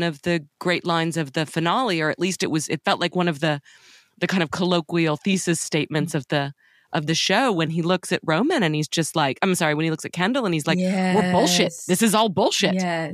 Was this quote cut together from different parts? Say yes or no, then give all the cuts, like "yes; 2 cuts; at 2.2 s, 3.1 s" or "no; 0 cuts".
no; 0 cuts